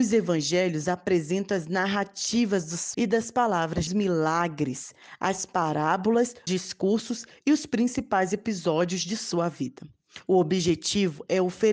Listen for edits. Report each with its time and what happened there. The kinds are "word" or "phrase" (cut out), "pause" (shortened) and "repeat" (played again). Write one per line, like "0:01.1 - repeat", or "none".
0:02.9 - word
0:03.9 - phrase
0:06.5 - word

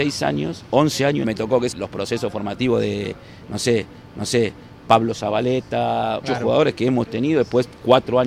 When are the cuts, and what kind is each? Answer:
0:01.2 - phrase
0:01.7 - phrase
0:04.1 - repeat
0:06.2 - word
0:06.7 - word

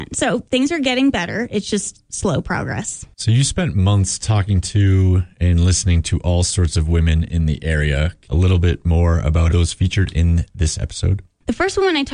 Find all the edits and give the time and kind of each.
0:03.1 - pause
0:08.3 - phrase
0:09.5 - phrase

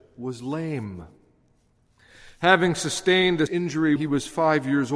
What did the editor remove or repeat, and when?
0:03.5 - word
0:04.0 - word

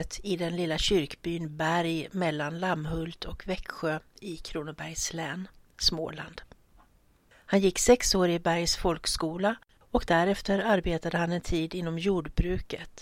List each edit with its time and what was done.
none

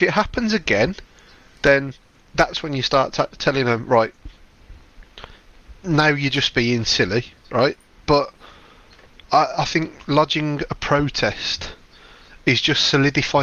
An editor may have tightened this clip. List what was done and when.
0:07.4 - pause

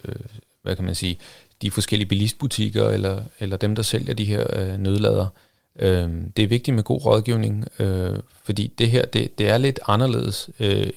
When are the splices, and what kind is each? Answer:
none

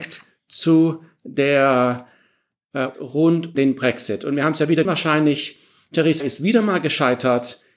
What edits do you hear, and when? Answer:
0:02.9 - word
0:03.5 - word
0:04.8 - word
0:06.2 - word

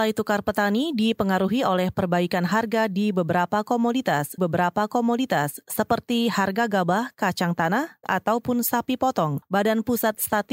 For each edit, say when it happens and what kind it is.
0:04.4 - repeat
0:08.0 - word

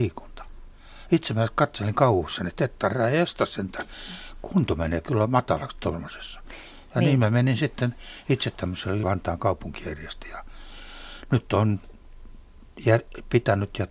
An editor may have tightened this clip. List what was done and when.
0:09.0 - phrase

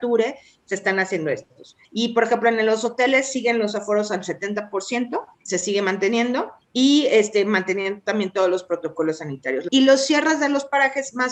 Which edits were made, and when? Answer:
0:01.8 - pause
0:05.3 - pause
0:06.6 - pause

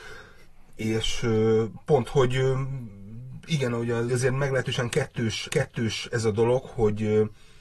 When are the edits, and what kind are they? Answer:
0:02.0 - word
0:04.1 - phrase
0:05.5 - repeat

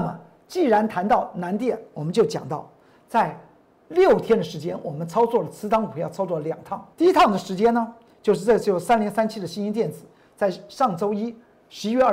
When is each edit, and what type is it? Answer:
0:06.9 - pause

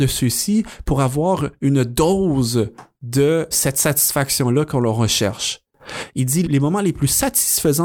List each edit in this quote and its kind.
0:03.5 - word
0:06.4 - word

